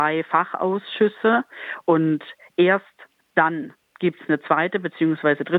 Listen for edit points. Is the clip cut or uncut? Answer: uncut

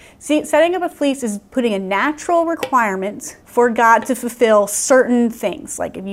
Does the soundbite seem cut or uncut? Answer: cut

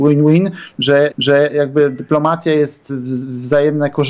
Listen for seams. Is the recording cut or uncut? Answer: cut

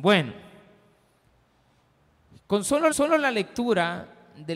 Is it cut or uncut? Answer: cut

